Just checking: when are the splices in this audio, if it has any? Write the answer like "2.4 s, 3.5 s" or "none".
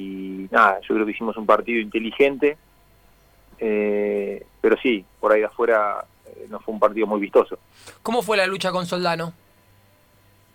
4.5 s, 6.1 s